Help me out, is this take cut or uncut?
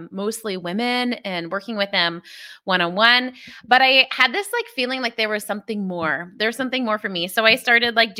uncut